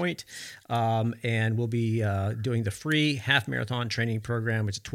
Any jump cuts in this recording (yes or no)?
no